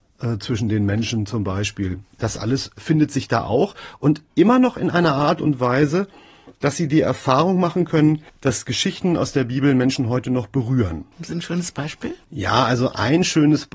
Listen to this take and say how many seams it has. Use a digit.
6